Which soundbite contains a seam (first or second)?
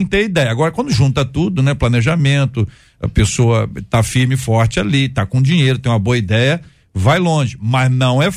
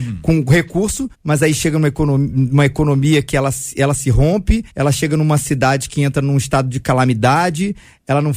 second